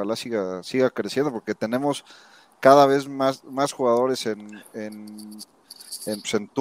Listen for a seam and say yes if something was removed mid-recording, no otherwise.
no